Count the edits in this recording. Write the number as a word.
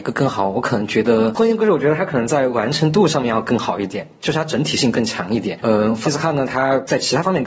one